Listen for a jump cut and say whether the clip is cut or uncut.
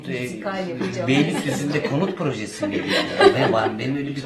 uncut